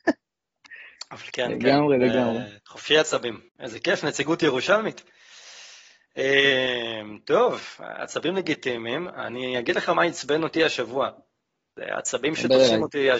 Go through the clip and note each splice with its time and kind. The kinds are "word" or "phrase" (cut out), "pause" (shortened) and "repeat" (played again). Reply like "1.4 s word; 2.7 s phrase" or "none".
2.6 s pause; 3.5 s pause